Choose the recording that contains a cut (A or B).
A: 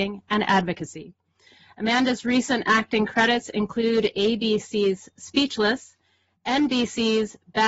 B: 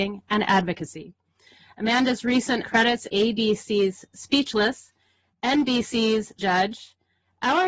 B